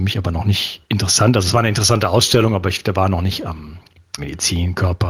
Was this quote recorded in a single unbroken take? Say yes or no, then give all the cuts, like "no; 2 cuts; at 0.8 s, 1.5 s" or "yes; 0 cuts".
no; 1 cut; at 4.2 s